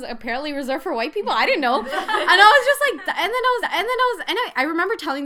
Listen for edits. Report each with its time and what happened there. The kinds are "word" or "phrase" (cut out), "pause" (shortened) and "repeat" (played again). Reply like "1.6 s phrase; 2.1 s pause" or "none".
3.6 s repeat